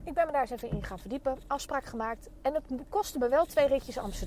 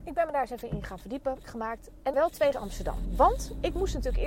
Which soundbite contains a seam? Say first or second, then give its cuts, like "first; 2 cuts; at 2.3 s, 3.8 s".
second; 3 cuts; at 1.4 s, 2.1 s, 2.5 s